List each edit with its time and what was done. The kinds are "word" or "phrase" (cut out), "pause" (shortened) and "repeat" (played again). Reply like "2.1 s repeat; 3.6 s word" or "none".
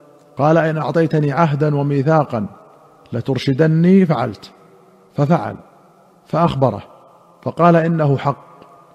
none